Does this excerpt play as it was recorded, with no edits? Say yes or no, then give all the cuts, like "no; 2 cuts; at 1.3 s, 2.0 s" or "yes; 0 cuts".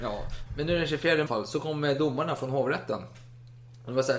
no; 1 cut; at 1.3 s